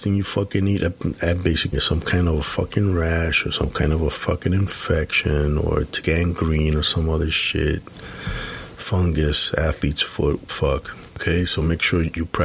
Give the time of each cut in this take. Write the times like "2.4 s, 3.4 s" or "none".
1.7 s, 6.0 s, 10.5 s